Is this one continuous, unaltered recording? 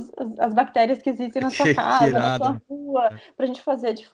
yes; 0 cuts

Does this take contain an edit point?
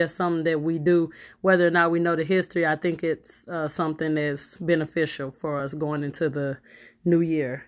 no; 0 cuts

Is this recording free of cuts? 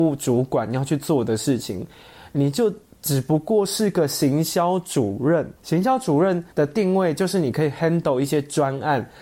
no; 2 cuts; at 5.6 s, 6.5 s

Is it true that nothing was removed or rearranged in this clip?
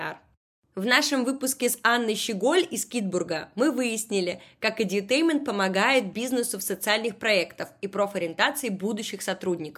yes; 0 cuts

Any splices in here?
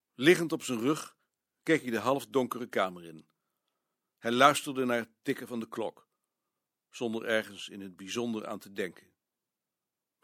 no; 0 cuts

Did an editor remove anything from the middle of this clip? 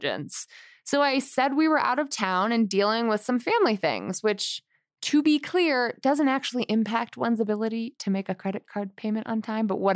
no; 0 cuts

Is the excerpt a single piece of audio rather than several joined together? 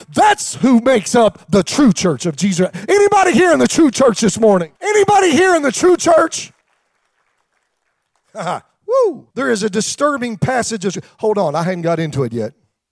no; 3 cuts; at 4.8 s, 6.6 s, 9.3 s

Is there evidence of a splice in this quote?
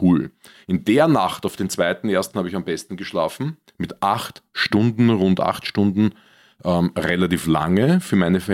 no; 0 cuts

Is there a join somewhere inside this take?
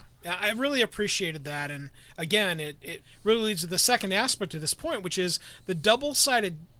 no; 0 cuts

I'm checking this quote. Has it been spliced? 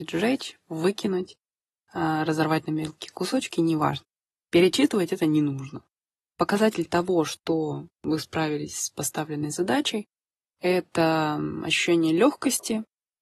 no; 0 cuts

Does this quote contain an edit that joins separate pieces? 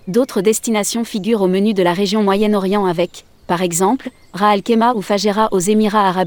no; 0 cuts

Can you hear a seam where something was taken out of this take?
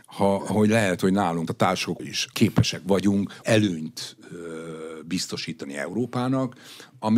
yes; 4 cuts; at 1.5 s, 2.0 s, 2.3 s, 3.4 s

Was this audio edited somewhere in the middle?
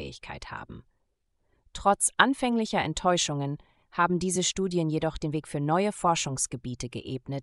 no; 0 cuts

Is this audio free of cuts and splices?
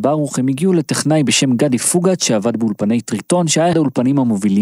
no; 1 cut; at 3.7 s

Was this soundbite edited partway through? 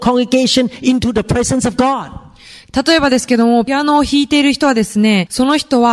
no; 0 cuts

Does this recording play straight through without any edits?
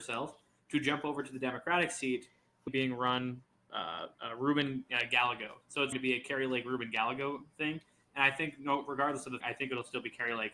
no; 5 cuts; at 2.7 s, 4.1 s, 5.6 s, 5.9 s, 9.4 s

